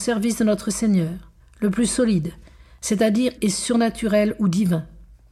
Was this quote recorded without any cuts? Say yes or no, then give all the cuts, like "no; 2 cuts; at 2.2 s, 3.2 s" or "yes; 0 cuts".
no; 2 cuts; at 1.4 s, 3.4 s